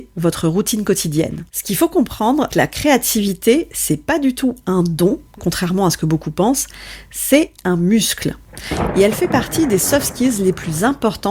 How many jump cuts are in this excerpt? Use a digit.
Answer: 3